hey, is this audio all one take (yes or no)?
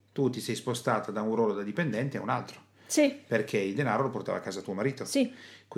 yes